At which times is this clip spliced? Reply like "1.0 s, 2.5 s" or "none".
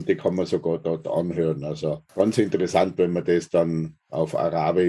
none